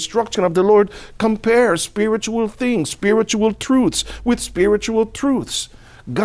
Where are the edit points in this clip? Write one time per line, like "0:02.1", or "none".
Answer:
none